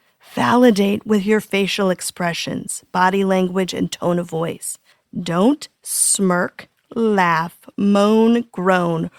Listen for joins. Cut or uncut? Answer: uncut